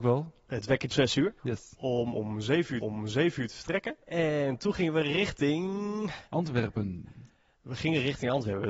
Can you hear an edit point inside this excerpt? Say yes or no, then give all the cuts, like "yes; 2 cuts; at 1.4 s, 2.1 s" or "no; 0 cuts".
yes; 5 cuts; at 0.9 s, 1.4 s, 2.8 s, 4.0 s, 6.3 s